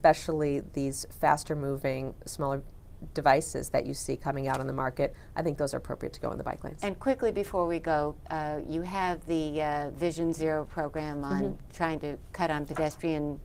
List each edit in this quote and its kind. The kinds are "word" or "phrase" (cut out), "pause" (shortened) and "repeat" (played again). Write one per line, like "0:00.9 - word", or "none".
none